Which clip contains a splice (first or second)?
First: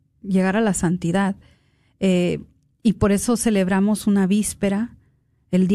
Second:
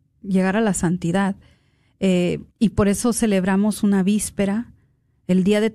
second